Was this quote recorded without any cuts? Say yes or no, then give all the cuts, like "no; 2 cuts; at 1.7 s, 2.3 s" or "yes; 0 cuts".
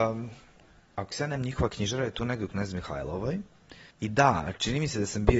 no; 2 cuts; at 1.4 s, 3.9 s